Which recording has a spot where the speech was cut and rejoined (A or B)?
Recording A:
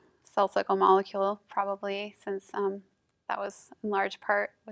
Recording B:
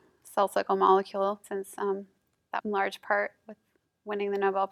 B